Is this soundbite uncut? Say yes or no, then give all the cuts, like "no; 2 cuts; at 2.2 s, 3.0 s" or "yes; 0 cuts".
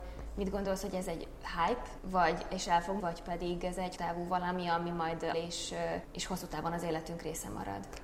no; 5 cuts; at 2.0 s, 3.0 s, 4.0 s, 5.3 s, 6.0 s